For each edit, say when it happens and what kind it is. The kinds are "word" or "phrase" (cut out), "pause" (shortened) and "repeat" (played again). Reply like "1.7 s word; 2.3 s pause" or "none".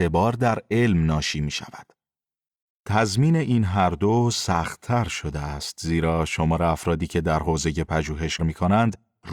8.4 s word